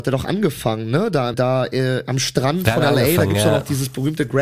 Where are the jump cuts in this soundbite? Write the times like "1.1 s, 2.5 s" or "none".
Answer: 1.3 s